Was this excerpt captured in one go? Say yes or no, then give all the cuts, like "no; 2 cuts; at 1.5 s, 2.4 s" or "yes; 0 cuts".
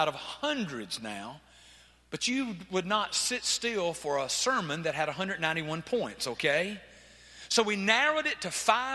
yes; 0 cuts